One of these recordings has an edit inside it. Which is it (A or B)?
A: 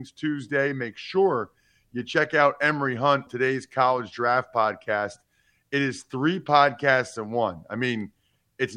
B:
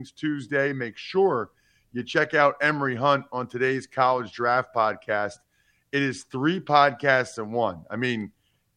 A